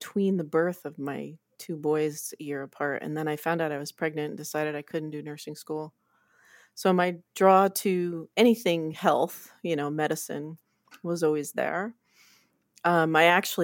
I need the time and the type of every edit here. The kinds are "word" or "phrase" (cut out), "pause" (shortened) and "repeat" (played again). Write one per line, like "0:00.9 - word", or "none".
none